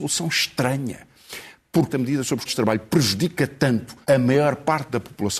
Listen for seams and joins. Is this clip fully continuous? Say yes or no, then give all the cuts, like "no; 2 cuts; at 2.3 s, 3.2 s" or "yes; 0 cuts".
no; 3 cuts; at 1.9 s, 2.5 s, 4.0 s